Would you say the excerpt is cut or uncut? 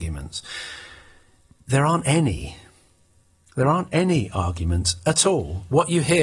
uncut